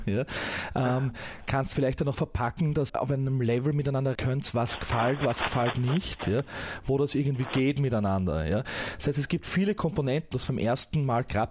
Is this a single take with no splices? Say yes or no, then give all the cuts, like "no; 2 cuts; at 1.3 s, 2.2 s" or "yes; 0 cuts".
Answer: no; 6 cuts; at 1.7 s, 2.1 s, 2.9 s, 4.1 s, 7.5 s, 10.3 s